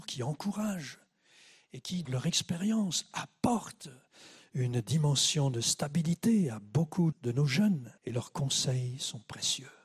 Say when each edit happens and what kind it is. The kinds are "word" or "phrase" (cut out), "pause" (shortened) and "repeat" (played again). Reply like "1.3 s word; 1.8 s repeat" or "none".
2.0 s word; 7.1 s word; 8.0 s pause

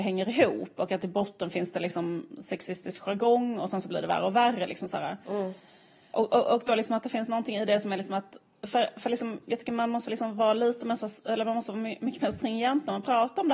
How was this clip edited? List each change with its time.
none

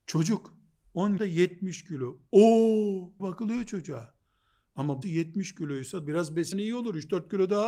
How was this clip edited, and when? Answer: 1.2 s word; 3.2 s word; 5.0 s word; 6.0 s word; 6.5 s word

